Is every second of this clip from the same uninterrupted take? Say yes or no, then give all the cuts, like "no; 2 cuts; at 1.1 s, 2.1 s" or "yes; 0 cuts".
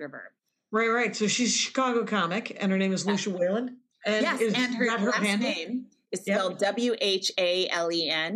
yes; 0 cuts